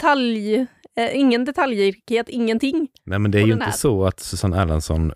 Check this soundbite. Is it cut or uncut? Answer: uncut